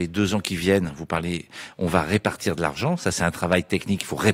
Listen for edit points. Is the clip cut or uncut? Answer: uncut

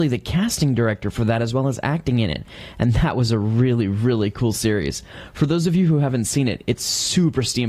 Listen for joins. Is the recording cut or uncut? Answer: uncut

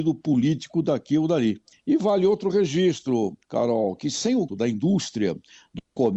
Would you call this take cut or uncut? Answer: cut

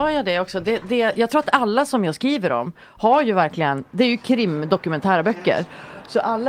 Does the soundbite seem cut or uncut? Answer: uncut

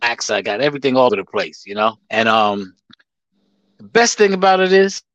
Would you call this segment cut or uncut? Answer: cut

